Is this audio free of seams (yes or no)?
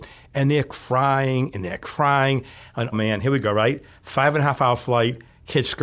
no